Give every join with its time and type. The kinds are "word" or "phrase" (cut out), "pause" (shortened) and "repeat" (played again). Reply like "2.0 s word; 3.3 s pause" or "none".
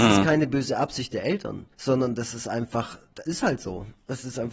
1.7 s pause; 3.3 s word